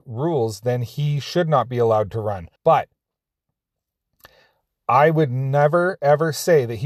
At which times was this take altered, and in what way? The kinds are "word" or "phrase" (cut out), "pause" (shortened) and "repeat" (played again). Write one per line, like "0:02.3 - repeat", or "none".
0:02.6 - pause